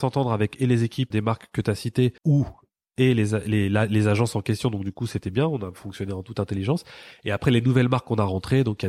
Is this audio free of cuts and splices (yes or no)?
no